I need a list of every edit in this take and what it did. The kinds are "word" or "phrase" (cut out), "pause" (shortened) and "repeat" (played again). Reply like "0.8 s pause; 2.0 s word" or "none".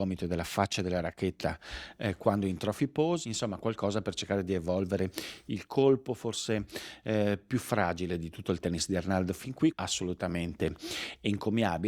9.7 s word